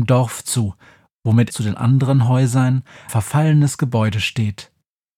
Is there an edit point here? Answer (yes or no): yes